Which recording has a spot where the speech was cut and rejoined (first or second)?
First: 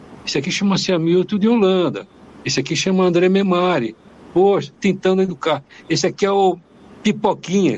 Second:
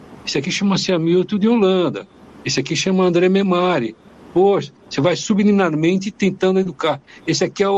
first